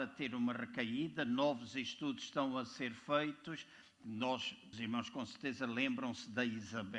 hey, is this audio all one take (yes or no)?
no